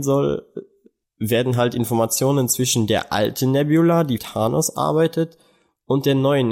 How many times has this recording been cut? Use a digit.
1